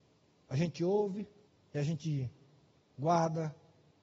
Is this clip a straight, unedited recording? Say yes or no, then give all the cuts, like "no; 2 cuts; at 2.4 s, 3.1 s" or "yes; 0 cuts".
no; 1 cut; at 1.5 s